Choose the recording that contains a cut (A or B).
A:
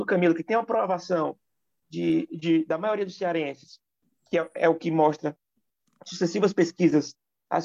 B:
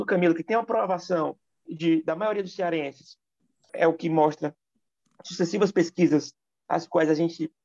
B